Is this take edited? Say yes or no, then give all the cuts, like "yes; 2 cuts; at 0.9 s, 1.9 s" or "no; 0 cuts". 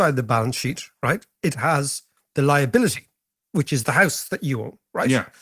no; 0 cuts